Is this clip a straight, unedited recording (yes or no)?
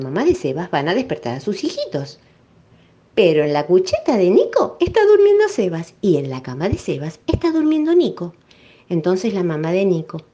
yes